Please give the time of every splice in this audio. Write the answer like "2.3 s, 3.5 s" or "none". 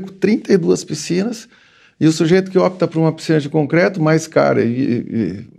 none